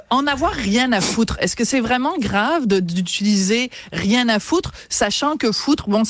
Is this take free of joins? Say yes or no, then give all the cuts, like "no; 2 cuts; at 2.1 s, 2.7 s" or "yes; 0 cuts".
yes; 0 cuts